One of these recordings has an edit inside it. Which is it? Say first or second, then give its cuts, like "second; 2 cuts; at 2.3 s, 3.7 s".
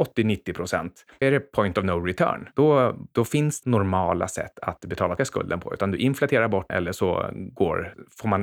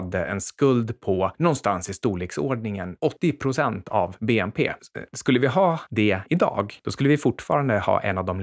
first; 4 cuts; at 1.2 s, 3.6 s, 5.2 s, 6.7 s